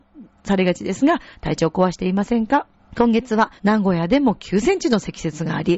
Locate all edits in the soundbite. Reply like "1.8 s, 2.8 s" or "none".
2.8 s, 3.6 s